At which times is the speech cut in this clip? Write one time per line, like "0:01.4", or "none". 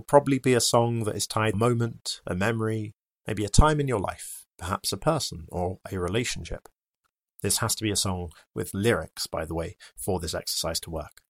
0:01.5
0:04.5